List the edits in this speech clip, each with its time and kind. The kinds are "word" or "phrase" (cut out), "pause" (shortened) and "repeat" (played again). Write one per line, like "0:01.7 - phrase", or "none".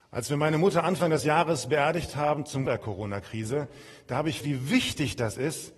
0:02.7 - phrase
0:04.4 - word